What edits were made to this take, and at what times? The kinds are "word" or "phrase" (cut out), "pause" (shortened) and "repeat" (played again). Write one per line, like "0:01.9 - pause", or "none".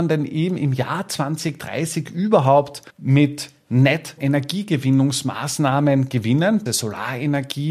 0:02.9 - pause
0:04.2 - word
0:06.7 - word